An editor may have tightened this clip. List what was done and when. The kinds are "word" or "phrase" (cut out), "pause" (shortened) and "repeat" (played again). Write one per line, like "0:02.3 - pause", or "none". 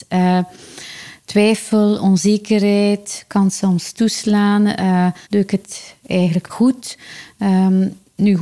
0:05.2 - pause
0:06.5 - word